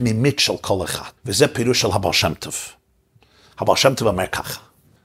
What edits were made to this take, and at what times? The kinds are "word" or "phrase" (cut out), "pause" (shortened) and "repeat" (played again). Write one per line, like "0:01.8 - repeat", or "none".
0:01.2 - pause

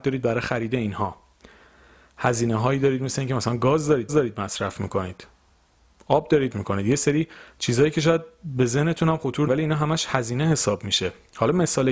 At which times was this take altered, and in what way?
0:04.1 - repeat
0:05.5 - pause
0:06.5 - word
0:09.5 - word

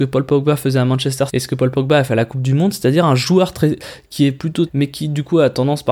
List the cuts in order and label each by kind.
0:01.3 - phrase
0:04.7 - word

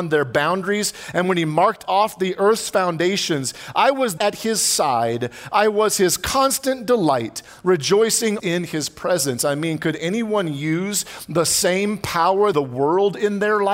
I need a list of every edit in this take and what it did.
0:04.2 - phrase
0:08.4 - word
0:12.5 - phrase

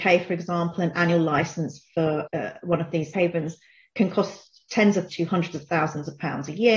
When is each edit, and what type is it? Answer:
0:02.3 - word
0:03.1 - word
0:05.1 - word

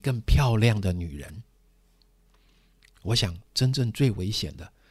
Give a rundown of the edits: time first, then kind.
0:03.4 - pause

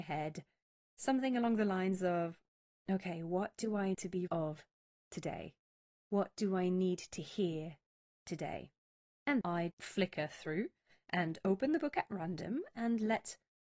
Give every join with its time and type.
0:03.9 - word
0:04.3 - word
0:09.4 - word
0:09.7 - word

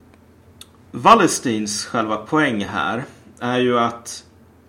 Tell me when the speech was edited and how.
none

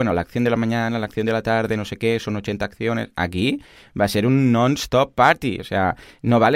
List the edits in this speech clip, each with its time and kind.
none

